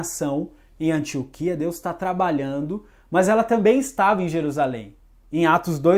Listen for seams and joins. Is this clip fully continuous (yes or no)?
yes